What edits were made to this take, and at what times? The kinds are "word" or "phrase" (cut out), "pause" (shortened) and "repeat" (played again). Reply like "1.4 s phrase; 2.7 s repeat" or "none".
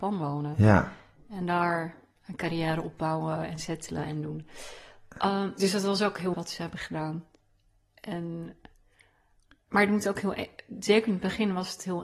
6.3 s word